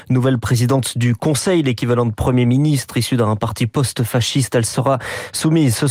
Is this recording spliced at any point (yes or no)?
no